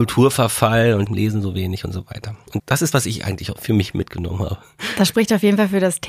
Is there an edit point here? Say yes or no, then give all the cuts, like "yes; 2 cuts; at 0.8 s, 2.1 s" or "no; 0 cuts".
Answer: yes; 3 cuts; at 1.1 s, 2.6 s, 2.9 s